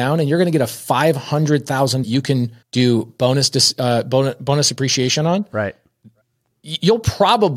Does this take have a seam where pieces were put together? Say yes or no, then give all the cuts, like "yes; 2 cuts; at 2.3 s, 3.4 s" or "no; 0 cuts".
yes; 2 cuts; at 2.0 s, 2.6 s